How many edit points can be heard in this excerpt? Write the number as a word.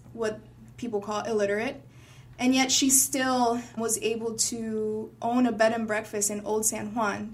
one